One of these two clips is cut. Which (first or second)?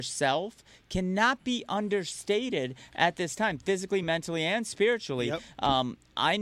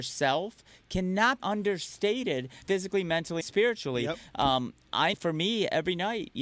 second